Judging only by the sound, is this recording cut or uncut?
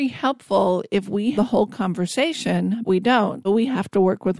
cut